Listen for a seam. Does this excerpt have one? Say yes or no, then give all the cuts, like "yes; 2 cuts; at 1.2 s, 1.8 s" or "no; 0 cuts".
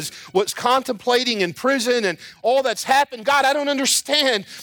no; 0 cuts